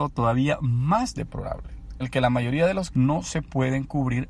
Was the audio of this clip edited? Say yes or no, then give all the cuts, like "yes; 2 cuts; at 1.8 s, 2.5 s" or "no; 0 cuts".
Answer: yes; 2 cuts; at 2.0 s, 2.9 s